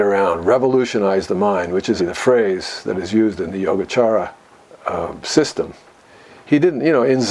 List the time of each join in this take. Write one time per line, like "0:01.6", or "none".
0:02.0
0:04.5